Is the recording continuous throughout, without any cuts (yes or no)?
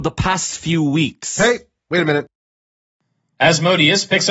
yes